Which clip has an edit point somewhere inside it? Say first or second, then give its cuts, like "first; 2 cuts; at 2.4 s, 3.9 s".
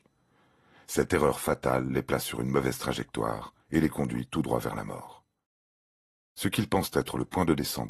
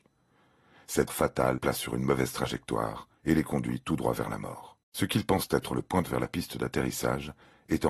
second; 4 cuts; at 1.1 s, 1.6 s, 4.8 s, 6.0 s